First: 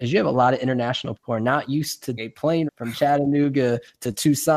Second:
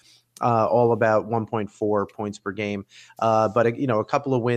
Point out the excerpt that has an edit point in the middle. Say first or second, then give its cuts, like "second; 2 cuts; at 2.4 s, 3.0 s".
first; 3 cuts; at 1.2 s, 2.2 s, 2.7 s